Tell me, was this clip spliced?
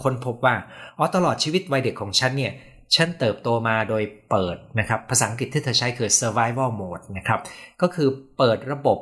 no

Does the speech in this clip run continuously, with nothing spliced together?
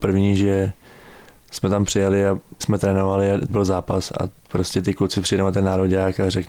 no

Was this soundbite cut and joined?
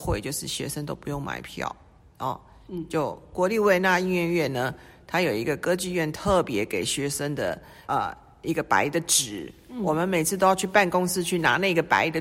yes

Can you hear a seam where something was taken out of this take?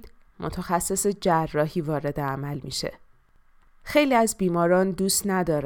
no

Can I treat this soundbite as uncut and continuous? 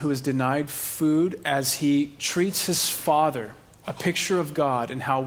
yes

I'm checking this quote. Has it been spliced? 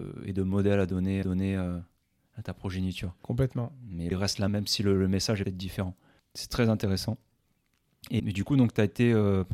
yes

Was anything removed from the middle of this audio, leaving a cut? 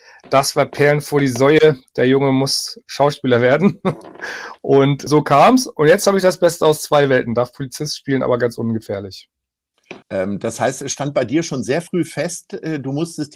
yes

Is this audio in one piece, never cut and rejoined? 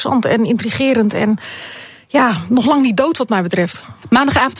yes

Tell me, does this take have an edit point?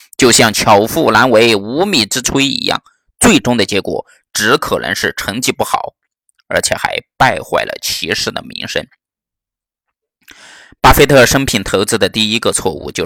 no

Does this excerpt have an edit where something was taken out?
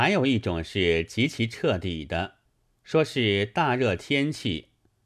yes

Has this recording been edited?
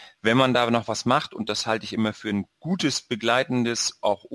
no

